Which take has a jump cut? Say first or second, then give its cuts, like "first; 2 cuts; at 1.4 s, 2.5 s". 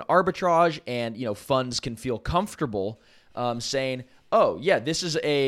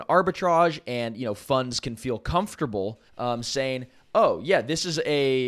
second; 1 cut; at 3.1 s